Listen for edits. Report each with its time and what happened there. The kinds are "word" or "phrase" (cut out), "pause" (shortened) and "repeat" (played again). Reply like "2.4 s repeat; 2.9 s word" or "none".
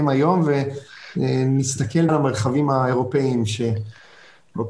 2.1 s word